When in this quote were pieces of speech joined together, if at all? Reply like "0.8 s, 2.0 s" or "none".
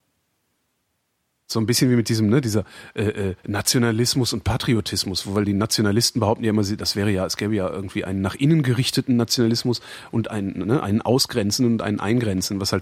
3.4 s